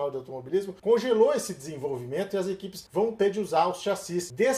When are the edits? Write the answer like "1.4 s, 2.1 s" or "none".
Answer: none